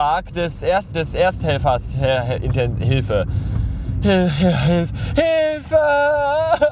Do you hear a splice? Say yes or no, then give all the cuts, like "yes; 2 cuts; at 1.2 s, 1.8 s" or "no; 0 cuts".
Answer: yes; 1 cut; at 0.9 s